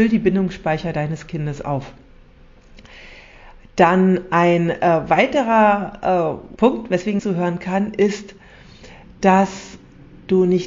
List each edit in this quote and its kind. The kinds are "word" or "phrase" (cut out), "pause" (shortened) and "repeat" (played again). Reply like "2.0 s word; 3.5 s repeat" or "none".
6.6 s word; 7.2 s phrase